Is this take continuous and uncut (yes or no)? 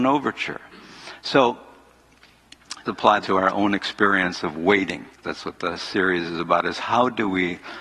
no